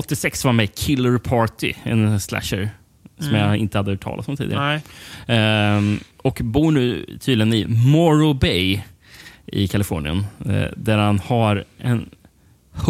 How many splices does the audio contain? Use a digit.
1